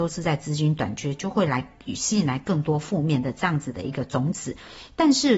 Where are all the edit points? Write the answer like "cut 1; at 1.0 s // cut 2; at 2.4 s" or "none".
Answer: none